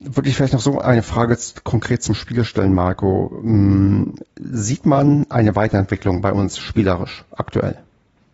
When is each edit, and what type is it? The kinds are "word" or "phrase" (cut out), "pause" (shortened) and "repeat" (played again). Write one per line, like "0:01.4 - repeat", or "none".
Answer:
0:04.3 - pause